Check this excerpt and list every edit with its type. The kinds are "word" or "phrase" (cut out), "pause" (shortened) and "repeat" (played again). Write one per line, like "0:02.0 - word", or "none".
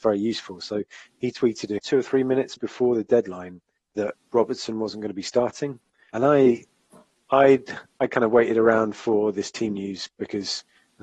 0:01.8 - word
0:02.6 - word
0:03.8 - word
0:06.1 - word

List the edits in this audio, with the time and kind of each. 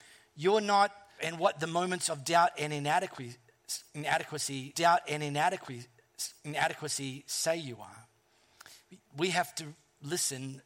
0:01.2 - word
0:04.7 - repeat
0:09.0 - pause

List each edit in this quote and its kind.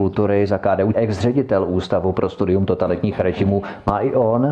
0:00.9 - phrase

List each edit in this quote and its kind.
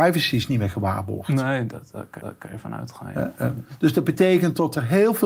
0:02.2 - repeat

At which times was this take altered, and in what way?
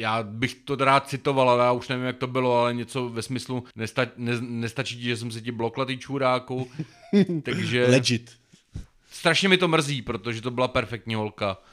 0:03.7 - pause

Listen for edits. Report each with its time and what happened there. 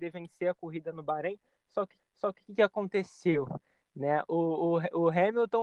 0:02.0 - repeat

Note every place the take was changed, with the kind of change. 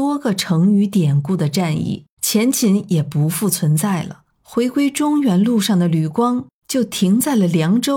0:02.1 - pause
0:04.3 - pause

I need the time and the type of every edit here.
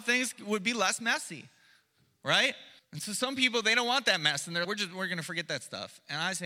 0:02.8 - pause
0:04.6 - word

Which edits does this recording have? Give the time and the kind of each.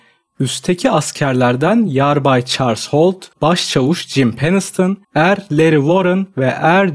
0:03.3 - pause
0:05.0 - pause

